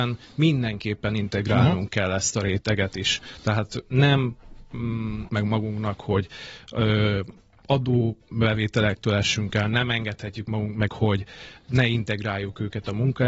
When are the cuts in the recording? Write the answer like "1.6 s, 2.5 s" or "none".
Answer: 5.3 s, 8.3 s, 10.9 s

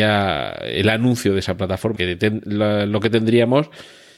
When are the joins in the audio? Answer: 2.0 s

